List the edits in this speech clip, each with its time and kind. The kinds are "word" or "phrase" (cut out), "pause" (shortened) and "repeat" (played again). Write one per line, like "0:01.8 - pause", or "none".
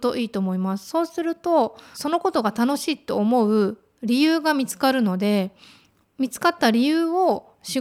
none